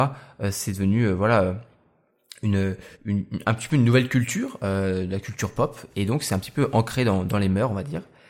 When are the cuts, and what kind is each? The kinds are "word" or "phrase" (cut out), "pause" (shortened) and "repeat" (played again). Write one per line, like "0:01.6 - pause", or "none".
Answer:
0:02.9 - pause